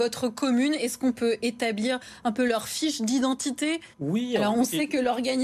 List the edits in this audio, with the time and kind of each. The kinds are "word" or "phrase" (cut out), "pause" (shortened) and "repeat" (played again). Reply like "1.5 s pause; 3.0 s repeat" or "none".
3.9 s pause